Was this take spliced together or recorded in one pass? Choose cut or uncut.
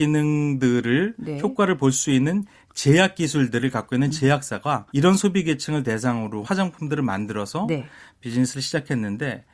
cut